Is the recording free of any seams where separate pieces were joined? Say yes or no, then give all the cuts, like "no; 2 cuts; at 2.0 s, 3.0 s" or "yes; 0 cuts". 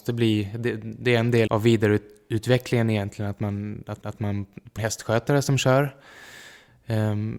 no; 3 cuts; at 1.5 s, 4.0 s, 4.8 s